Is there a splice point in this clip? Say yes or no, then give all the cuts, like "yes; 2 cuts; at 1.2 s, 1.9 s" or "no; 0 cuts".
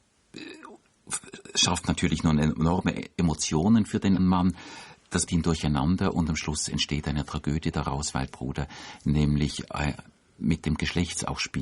yes; 3 cuts; at 4.2 s, 5.3 s, 8.3 s